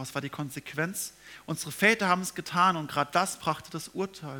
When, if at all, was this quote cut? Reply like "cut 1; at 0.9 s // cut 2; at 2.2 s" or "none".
none